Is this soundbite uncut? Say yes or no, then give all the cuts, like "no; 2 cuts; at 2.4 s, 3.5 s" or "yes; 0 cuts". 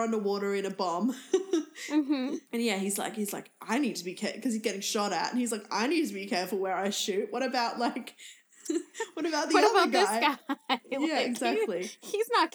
no; 1 cut; at 2.5 s